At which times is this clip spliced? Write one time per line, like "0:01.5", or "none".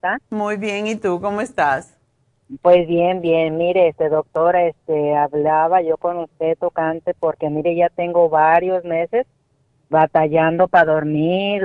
none